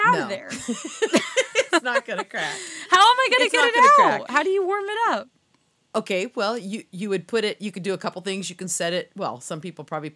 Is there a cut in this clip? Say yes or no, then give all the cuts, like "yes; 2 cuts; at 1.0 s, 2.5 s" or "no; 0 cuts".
no; 0 cuts